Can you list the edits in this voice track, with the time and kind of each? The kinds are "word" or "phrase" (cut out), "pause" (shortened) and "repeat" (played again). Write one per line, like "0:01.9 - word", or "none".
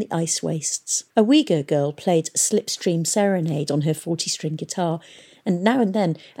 0:01.1 - pause